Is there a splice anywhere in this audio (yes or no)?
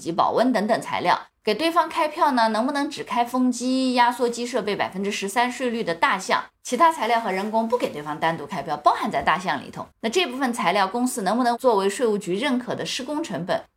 yes